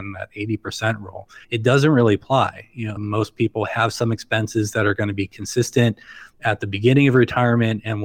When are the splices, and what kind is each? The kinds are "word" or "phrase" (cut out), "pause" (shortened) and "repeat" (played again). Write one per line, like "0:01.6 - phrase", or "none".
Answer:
0:01.4 - pause
0:06.3 - pause